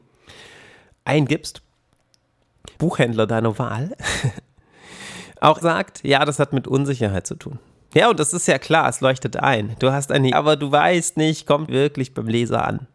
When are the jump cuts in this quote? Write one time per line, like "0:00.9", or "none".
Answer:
0:02.8
0:05.6
0:10.3
0:11.7